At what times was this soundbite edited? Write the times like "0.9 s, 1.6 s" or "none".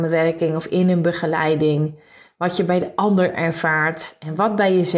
none